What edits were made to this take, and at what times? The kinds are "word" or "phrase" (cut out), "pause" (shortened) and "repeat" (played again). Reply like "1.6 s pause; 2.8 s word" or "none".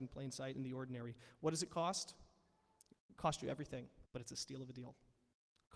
4.1 s pause